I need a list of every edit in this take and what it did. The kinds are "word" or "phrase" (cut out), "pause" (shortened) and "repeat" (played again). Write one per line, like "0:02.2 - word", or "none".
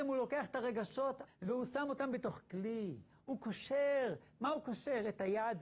0:01.3 - word